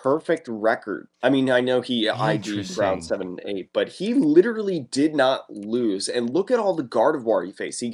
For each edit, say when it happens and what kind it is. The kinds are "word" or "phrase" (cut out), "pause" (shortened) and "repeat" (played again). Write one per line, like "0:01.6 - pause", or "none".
0:01.1 - pause

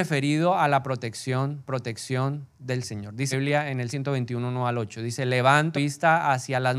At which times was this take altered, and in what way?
0:01.7 - repeat
0:03.3 - word
0:03.9 - word
0:05.7 - word

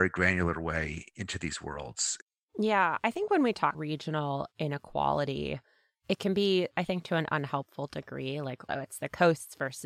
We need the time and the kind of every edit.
0:03.7 - word
0:06.7 - word

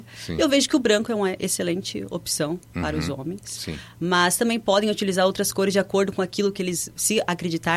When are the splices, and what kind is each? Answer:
none

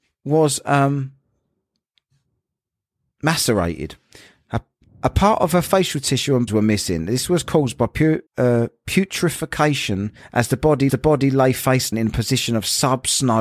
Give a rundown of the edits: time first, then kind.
0:06.5 - word
0:08.3 - pause
0:10.9 - repeat
0:11.9 - word

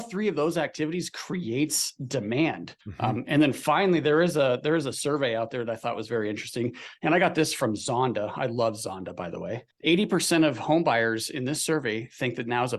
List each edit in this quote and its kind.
0:02.8 - pause
0:09.7 - pause

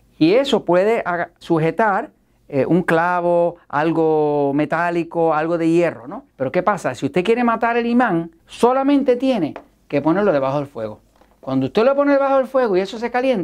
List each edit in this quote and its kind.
0:01.4 - word
0:06.3 - pause
0:08.4 - pause

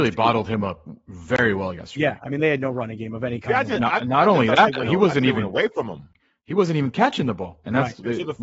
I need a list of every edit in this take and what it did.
none

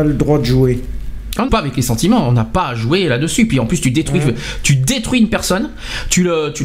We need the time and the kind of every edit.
0:01.5 - phrase

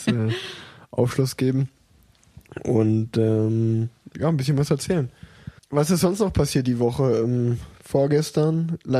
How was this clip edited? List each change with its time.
0:05.6 - pause

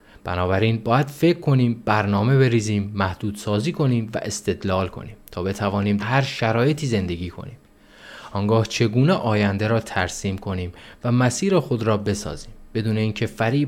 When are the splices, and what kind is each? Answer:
0:05.2 - pause
0:06.0 - word

